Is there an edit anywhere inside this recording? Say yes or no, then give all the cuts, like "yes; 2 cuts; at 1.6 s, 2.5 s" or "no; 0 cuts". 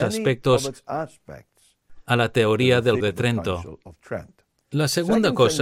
yes; 1 cut; at 3.0 s